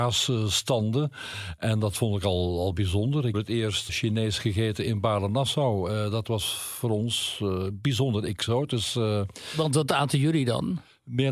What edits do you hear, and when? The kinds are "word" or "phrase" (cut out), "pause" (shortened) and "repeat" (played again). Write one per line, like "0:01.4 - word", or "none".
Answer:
0:03.3 - phrase
0:03.9 - word

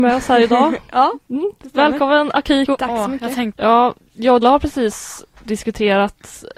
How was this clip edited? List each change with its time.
0:04.4 - word

